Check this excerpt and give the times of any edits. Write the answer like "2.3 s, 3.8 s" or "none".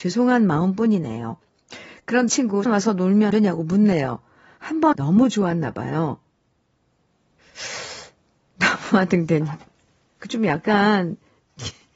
2.3 s, 2.7 s, 3.3 s, 4.9 s, 10.3 s